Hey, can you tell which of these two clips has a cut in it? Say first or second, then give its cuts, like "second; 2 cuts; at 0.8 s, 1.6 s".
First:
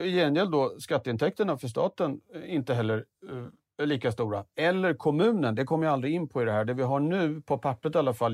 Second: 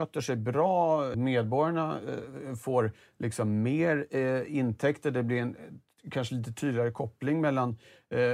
second; 1 cut; at 1.1 s